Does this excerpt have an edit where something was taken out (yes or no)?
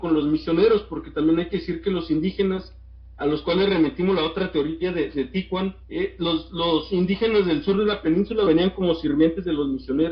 yes